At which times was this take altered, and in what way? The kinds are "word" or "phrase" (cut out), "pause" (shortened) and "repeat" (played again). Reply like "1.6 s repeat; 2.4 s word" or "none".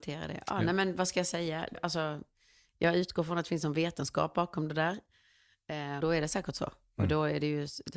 1.7 s word; 6.0 s word